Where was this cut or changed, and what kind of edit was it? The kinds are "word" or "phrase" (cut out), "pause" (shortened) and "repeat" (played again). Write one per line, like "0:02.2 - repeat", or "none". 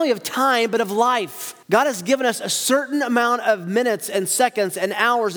0:01.6 - pause